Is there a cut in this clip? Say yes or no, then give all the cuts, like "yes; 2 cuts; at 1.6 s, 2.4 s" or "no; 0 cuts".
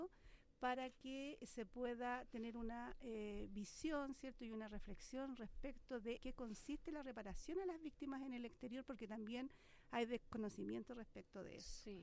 yes; 1 cut; at 6.2 s